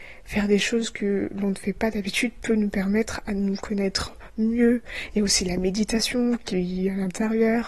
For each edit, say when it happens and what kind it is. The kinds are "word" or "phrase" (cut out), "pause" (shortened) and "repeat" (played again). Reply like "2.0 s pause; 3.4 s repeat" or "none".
none